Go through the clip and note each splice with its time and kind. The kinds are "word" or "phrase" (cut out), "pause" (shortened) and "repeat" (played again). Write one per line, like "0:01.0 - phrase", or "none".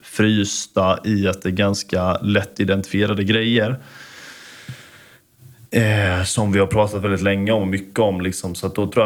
none